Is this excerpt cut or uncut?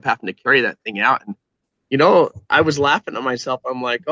uncut